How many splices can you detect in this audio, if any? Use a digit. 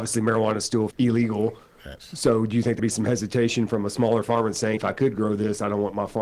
3